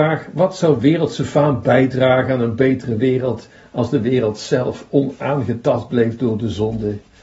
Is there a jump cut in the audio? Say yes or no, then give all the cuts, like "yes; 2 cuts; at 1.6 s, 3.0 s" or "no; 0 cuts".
no; 0 cuts